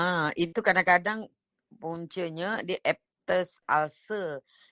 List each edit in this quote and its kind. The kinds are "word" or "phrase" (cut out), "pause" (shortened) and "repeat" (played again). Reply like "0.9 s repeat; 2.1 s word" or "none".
none

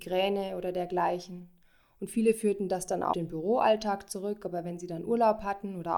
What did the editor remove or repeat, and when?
3.1 s word

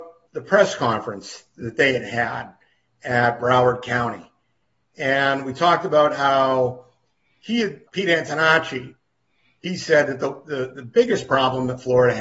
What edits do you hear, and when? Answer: 7.9 s word

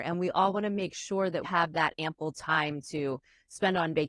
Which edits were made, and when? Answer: 1.4 s word

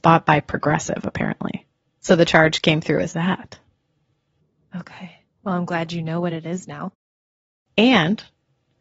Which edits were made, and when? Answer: none

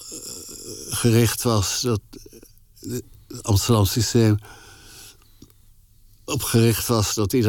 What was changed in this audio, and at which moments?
none

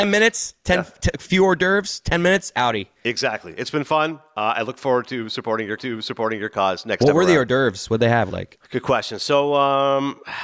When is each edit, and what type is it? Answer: 5.8 s repeat; 8.3 s phrase

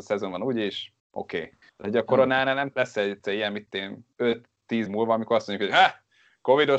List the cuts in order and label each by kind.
1.0 s pause; 1.6 s pause; 2.7 s phrase; 4.1 s pause; 4.9 s word

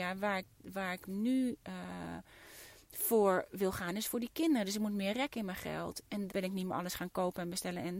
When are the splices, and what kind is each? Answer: 6.3 s phrase

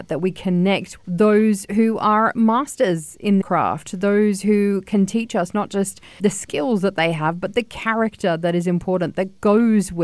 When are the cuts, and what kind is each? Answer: 1.0 s word; 3.4 s word; 6.2 s word

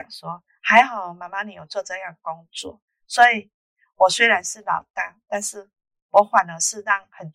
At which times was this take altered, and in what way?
none

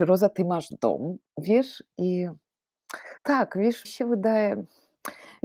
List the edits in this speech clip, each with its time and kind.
1.3 s pause; 3.2 s pause; 3.8 s word

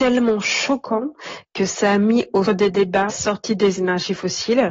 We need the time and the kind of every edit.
2.5 s word; 3.1 s word

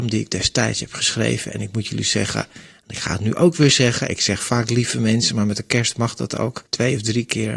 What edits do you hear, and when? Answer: 6.7 s pause

